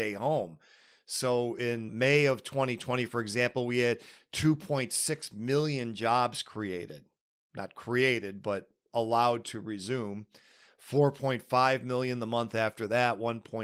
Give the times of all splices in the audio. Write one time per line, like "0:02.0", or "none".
none